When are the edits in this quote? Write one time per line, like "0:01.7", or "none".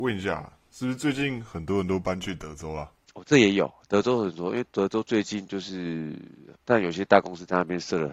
0:06.6